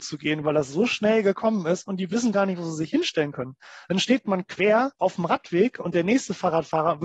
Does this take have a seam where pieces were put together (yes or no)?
yes